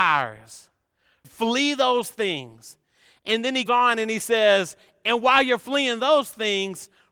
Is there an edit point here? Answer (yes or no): yes